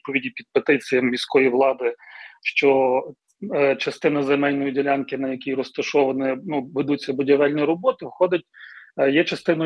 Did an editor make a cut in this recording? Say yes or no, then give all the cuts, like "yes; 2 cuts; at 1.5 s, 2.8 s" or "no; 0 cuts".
no; 0 cuts